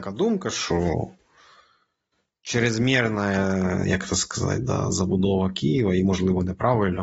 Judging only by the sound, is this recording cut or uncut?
uncut